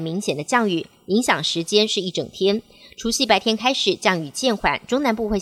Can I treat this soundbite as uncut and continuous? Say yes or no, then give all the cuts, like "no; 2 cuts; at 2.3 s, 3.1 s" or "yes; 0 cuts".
yes; 0 cuts